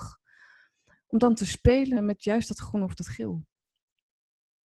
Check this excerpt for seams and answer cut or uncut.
cut